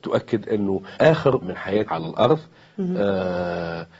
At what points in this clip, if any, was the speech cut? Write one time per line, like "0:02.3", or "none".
0:01.0
0:01.4
0:01.9